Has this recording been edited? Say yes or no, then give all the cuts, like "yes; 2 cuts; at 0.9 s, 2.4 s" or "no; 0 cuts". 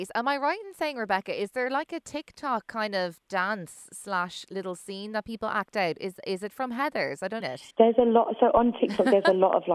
yes; 2 cuts; at 7.4 s, 7.7 s